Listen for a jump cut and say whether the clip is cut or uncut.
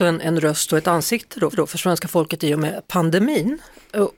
cut